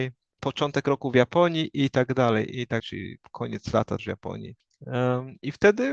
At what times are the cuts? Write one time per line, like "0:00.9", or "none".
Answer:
0:02.8
0:04.0